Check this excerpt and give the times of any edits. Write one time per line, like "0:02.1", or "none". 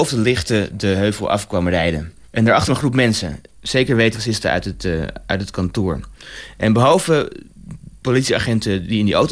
0:02.2
0:02.7
0:04.1